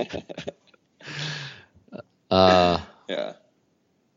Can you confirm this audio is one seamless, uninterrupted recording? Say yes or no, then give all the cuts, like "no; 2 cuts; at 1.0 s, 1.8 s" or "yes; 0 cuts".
yes; 0 cuts